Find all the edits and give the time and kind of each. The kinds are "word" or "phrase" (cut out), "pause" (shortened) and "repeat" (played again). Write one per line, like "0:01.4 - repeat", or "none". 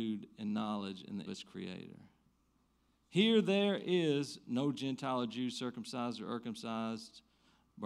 0:01.3 - phrase